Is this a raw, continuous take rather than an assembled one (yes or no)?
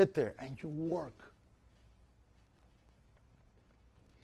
yes